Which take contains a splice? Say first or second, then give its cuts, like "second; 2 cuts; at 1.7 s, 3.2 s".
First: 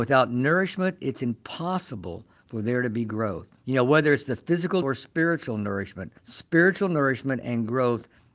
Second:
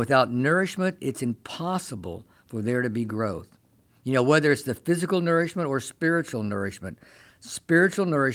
first; 3 cuts; at 3.6 s, 4.8 s, 6.2 s